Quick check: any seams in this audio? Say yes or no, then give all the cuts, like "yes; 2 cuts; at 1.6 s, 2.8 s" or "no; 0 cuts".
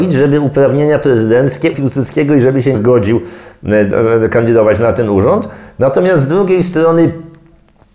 yes; 2 cuts; at 1.7 s, 2.7 s